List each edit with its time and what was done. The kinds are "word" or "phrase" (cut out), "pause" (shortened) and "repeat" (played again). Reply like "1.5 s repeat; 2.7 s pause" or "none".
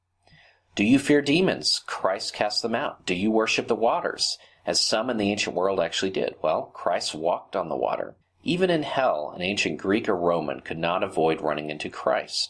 8.2 s pause